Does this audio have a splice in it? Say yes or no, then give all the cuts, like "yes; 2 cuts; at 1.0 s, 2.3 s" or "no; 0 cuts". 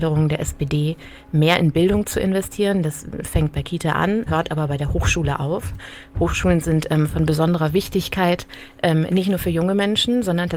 yes; 1 cut; at 4.3 s